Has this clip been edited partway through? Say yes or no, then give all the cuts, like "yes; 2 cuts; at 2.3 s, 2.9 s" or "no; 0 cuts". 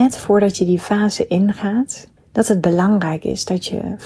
yes; 1 cut; at 2.2 s